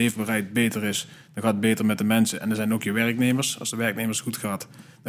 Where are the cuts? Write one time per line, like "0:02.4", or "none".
none